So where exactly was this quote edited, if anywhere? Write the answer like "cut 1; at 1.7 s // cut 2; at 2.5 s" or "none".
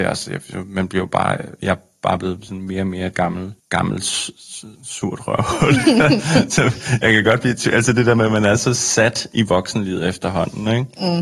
cut 1; at 3.6 s // cut 2; at 4.7 s